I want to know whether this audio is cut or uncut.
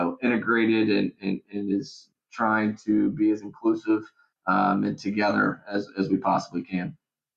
uncut